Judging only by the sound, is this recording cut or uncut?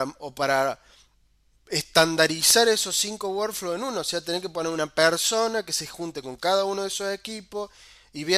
uncut